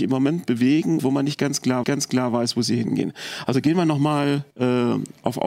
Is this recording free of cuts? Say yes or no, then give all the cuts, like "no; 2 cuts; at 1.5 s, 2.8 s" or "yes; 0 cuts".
no; 3 cuts; at 1.0 s, 1.8 s, 4.5 s